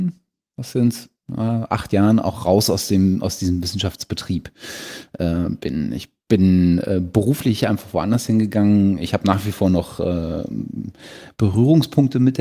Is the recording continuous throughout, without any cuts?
yes; 0 cuts

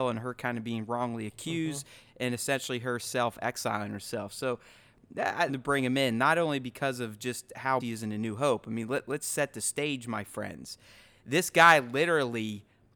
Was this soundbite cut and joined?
yes; 2 cuts; at 5.5 s, 7.8 s

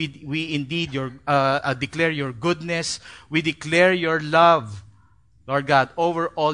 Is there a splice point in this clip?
no; 0 cuts

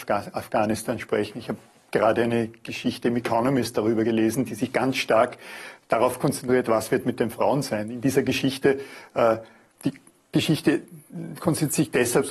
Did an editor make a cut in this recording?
no; 0 cuts

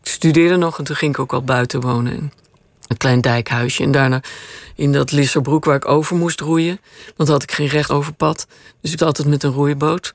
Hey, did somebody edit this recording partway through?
yes; 3 cuts; at 2.9 s, 7.9 s, 9.0 s

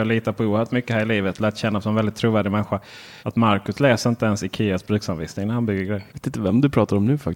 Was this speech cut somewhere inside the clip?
yes; 2 cuts; at 3.2 s, 6.1 s

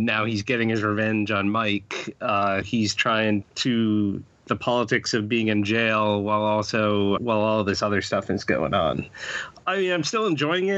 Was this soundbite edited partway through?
yes; 4 cuts; at 2.6 s, 3.4 s, 4.5 s, 7.2 s

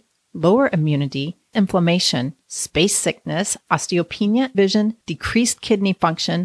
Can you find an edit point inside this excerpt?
yes; 4 cuts; at 1.5 s, 2.4 s, 4.5 s, 5.0 s

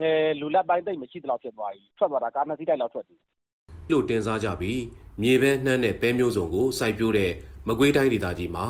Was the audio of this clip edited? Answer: yes; 2 cuts; at 1.9 s, 3.9 s

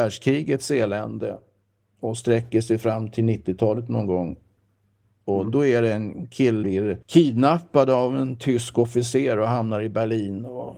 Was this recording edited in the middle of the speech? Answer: yes; 2 cuts; at 6.6 s, 7.0 s

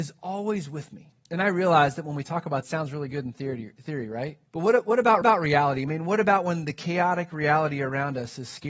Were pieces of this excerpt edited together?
yes; 4 cuts; at 1.2 s, 2.6 s, 4.5 s, 5.2 s

